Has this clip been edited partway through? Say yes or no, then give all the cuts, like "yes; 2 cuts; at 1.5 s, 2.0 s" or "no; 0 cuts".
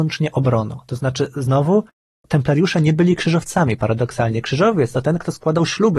no; 0 cuts